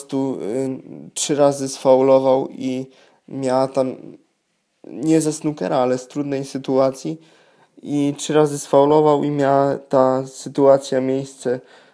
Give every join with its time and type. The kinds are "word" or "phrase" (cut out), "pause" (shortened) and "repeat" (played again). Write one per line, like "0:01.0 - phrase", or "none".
none